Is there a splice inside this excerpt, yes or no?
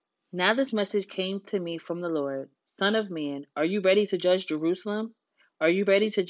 no